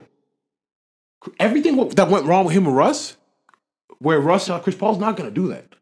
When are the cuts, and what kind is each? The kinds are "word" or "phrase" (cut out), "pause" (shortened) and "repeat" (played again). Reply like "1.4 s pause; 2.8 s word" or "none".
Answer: 4.5 s phrase